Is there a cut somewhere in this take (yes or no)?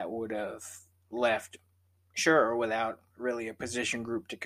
no